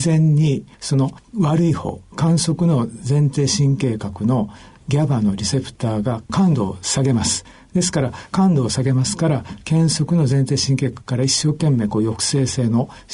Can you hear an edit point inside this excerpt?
no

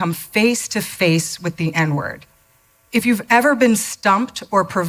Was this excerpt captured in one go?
no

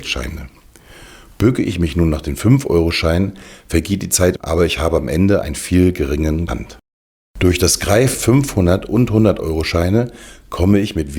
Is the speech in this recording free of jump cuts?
no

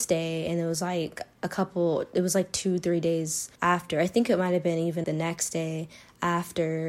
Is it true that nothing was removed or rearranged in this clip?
no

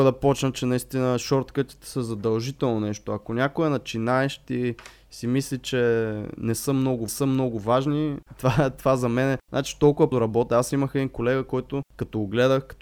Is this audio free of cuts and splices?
no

